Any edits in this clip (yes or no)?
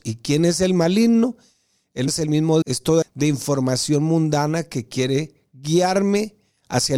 yes